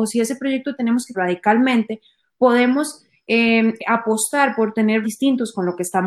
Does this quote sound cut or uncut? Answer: cut